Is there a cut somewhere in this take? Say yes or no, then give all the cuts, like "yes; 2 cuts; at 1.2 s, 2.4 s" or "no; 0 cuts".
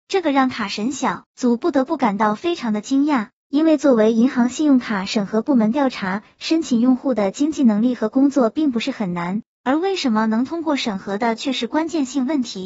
yes; 1 cut; at 1.3 s